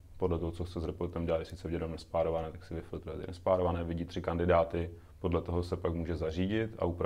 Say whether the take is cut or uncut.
cut